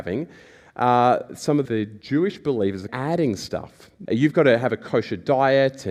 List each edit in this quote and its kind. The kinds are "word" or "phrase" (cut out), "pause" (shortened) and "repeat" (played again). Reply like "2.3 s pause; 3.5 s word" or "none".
1.6 s word; 2.9 s phrase; 4.0 s word